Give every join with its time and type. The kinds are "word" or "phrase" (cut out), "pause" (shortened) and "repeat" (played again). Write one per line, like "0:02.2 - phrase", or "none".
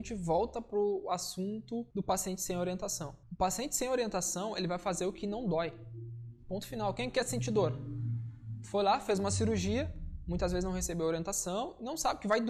0:01.9 - pause
0:03.2 - pause
0:06.4 - pause